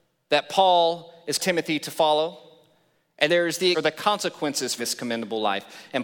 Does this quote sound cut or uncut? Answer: cut